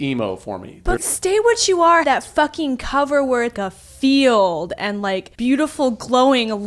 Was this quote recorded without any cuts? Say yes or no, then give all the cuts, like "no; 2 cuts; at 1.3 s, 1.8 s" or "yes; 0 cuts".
no; 4 cuts; at 1.0 s, 2.0 s, 3.5 s, 5.3 s